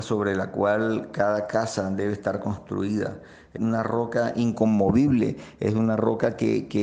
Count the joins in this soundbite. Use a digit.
1